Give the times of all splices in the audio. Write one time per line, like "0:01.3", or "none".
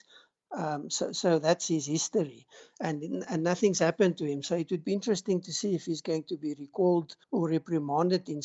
0:07.2